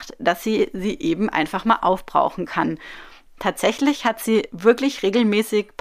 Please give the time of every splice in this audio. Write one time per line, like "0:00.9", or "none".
none

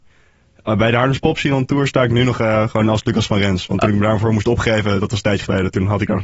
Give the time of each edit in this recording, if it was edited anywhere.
none

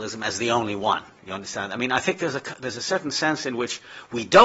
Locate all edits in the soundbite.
none

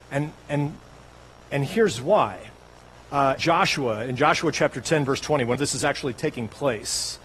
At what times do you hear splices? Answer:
0:03.4
0:05.6

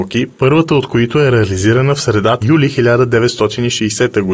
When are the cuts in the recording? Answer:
0:02.4

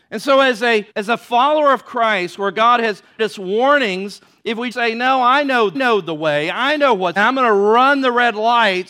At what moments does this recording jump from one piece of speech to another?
0:00.9
0:03.2
0:04.7
0:05.7
0:07.2

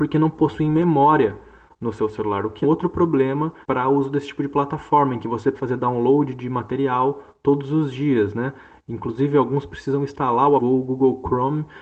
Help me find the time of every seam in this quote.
0:02.6
0:03.6
0:05.5
0:10.6

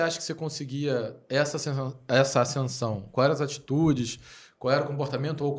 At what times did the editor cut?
none

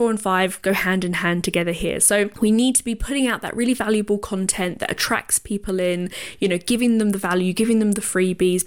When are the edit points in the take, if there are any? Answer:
none

